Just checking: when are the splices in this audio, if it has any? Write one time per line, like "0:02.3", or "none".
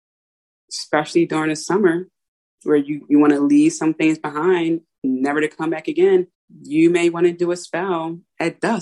0:06.3